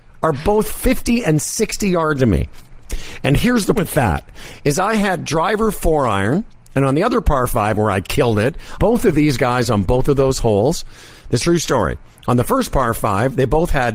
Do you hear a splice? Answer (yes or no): yes